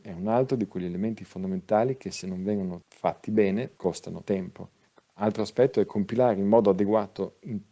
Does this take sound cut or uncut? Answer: uncut